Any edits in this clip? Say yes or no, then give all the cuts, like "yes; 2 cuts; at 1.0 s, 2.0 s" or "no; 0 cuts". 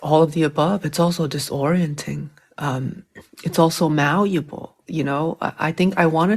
no; 0 cuts